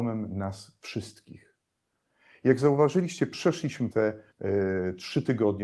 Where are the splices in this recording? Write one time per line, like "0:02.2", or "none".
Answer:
0:03.9
0:04.3